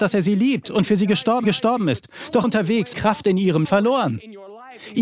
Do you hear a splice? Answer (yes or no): yes